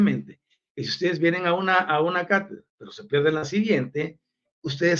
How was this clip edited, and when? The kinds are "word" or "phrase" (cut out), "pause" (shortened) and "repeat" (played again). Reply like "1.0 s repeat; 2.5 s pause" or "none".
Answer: 2.7 s pause